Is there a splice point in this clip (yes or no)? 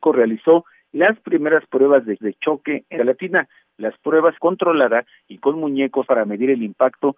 yes